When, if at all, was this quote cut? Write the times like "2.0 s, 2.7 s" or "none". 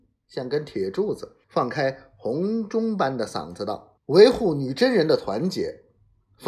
1.4 s, 4.0 s